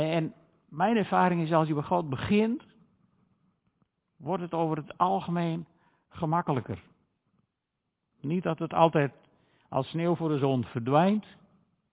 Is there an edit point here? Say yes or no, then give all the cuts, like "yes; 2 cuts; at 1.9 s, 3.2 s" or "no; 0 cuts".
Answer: no; 0 cuts